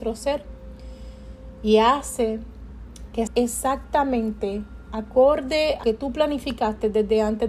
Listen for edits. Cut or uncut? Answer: cut